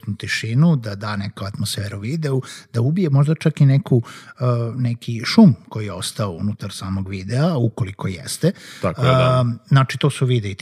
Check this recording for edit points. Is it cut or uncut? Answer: uncut